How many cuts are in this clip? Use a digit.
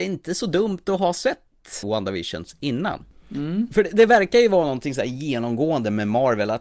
1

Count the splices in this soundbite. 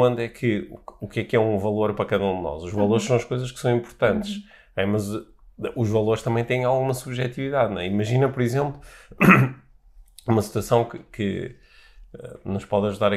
0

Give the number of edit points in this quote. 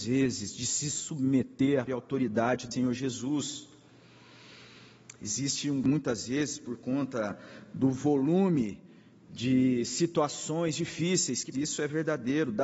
3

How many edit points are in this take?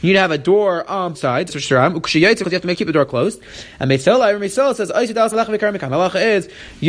5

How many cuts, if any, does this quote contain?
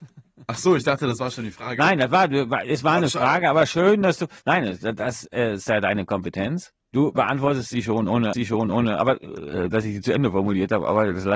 2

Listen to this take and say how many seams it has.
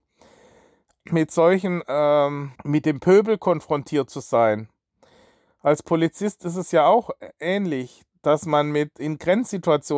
1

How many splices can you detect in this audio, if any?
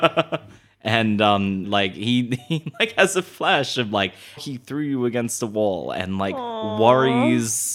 2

